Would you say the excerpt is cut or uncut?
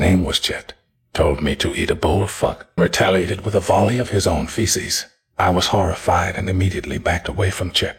cut